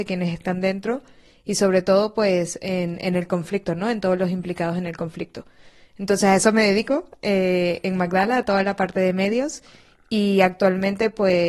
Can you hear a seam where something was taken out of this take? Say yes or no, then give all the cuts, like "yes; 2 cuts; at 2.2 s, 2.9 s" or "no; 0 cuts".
no; 0 cuts